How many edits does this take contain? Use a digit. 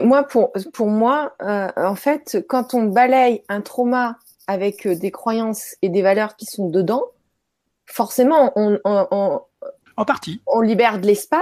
0